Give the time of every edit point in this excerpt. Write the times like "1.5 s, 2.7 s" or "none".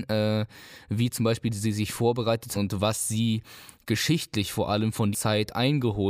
2.5 s, 5.1 s

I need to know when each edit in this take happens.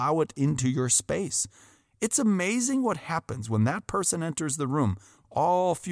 none

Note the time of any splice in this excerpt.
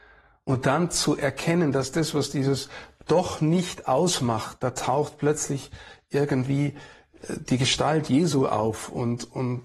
none

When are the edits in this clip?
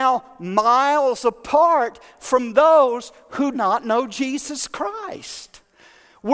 3.5 s

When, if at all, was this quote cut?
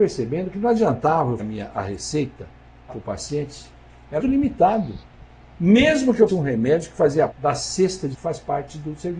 1.4 s, 2.9 s, 4.2 s, 6.3 s, 7.3 s, 8.1 s

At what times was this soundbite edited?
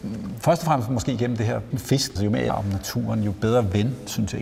1.7 s, 2.2 s, 2.5 s

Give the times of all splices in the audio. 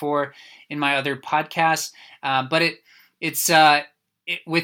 none

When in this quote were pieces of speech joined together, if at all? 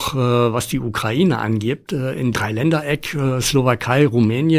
2.3 s

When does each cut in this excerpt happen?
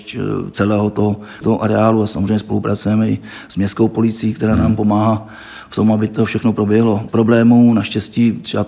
1.4 s, 7.1 s

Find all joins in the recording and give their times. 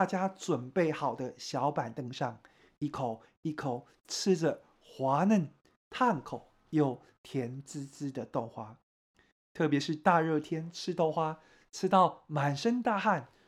none

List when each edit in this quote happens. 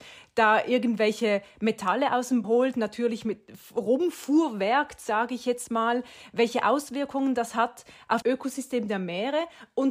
2.4 s, 8.2 s

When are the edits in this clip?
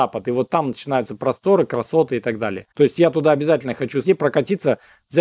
2.7 s, 4.0 s

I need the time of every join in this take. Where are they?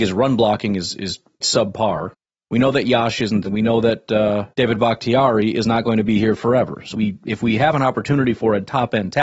1.4 s, 3.4 s, 4.5 s, 6.9 s

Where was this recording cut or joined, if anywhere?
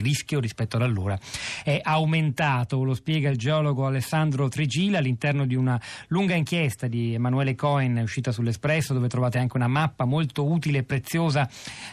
none

